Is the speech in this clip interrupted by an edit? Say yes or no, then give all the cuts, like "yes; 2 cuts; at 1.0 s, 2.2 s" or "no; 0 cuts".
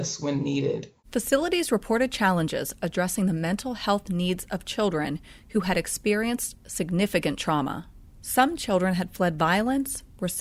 no; 0 cuts